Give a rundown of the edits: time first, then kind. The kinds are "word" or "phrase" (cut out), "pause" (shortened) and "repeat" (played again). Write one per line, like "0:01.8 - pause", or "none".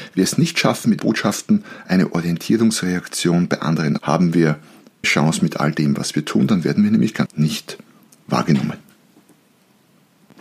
0:01.0 - word
0:04.0 - word
0:05.0 - word
0:07.3 - word